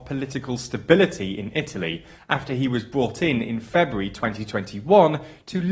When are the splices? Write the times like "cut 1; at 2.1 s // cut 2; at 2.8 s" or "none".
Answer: none